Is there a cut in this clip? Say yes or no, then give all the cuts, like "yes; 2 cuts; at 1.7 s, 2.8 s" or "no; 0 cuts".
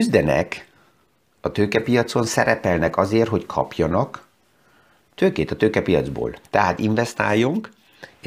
no; 0 cuts